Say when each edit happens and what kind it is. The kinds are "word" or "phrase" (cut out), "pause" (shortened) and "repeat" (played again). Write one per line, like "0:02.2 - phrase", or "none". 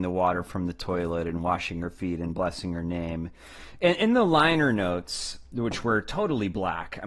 none